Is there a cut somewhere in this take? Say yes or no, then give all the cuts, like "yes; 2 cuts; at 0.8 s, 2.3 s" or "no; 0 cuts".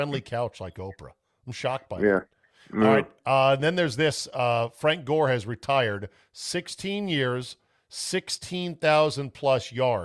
no; 0 cuts